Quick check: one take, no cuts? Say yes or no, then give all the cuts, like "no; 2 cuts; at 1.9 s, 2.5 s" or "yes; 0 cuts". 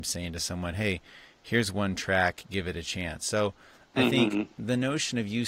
yes; 0 cuts